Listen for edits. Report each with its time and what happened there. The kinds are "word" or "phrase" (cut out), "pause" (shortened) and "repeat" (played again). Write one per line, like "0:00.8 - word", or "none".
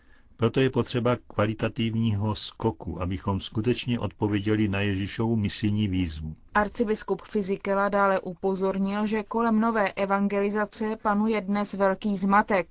0:06.5 - pause